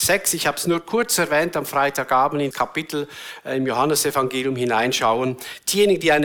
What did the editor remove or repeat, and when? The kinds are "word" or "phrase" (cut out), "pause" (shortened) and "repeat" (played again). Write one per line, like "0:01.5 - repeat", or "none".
0:02.5 - word